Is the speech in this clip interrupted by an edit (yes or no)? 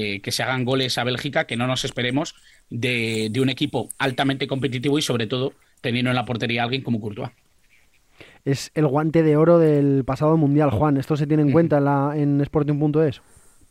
no